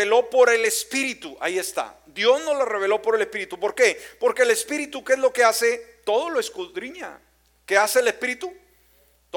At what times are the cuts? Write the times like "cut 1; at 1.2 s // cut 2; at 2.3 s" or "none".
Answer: none